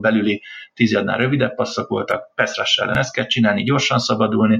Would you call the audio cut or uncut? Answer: uncut